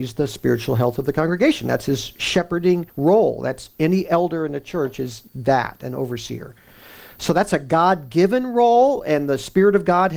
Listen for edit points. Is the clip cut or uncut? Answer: cut